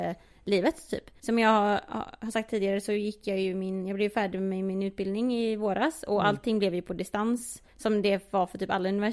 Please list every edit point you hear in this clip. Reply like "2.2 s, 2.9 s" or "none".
1.2 s, 7.7 s